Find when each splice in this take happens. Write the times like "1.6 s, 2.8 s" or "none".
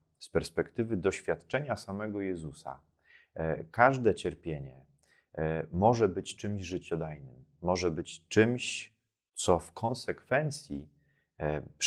none